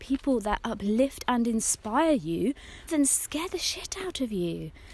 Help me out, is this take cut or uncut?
cut